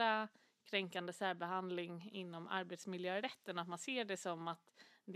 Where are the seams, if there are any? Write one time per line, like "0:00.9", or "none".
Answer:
none